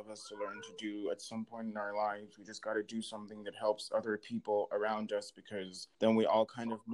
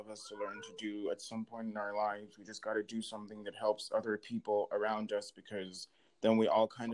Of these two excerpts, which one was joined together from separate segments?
first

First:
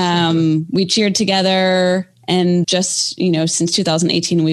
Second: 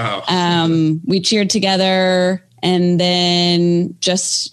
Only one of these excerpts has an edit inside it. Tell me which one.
first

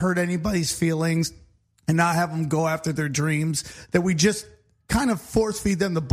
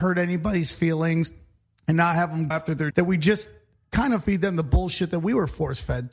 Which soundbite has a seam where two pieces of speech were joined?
second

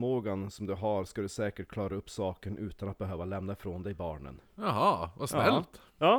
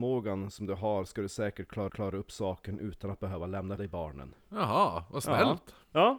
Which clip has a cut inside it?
second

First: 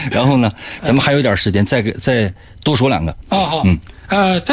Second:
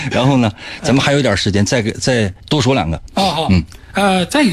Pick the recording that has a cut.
second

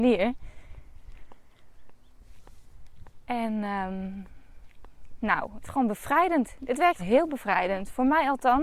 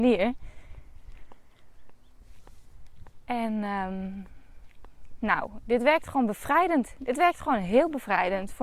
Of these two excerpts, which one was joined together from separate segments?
first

